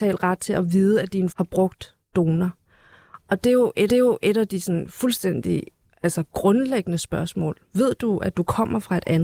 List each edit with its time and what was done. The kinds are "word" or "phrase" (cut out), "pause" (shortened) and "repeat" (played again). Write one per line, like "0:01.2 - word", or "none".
0:01.3 - word
0:03.9 - repeat